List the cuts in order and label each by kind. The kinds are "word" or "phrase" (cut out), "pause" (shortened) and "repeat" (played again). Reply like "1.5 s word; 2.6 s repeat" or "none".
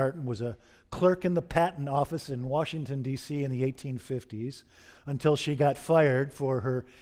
none